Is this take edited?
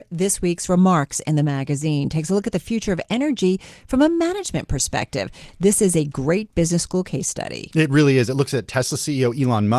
no; 0 cuts

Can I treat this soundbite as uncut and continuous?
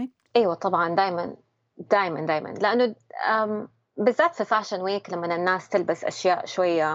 yes; 0 cuts

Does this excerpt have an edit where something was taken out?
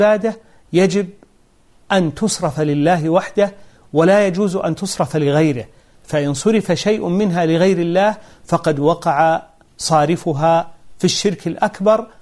no; 0 cuts

